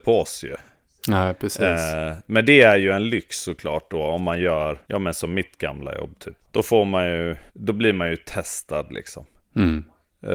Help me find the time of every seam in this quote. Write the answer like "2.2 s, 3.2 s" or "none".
4.8 s, 6.4 s, 7.5 s